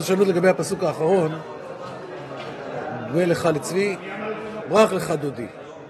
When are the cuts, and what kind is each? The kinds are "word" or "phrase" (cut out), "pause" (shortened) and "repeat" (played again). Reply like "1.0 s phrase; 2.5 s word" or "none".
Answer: 4.6 s word